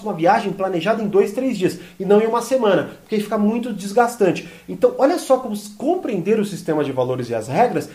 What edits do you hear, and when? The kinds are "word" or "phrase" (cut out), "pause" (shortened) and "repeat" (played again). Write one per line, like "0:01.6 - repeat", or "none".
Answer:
none